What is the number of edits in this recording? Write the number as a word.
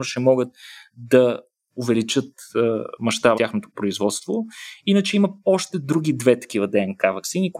two